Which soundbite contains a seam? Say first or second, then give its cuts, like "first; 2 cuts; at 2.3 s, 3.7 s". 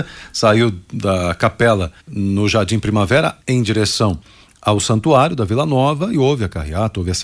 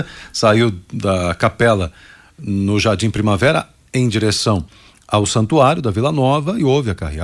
first; 2 cuts; at 2.0 s, 3.4 s